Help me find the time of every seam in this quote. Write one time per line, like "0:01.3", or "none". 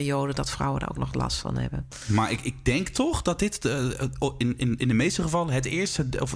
none